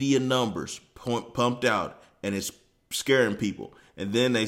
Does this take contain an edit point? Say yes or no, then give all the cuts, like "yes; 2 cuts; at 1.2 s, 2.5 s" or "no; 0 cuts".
no; 0 cuts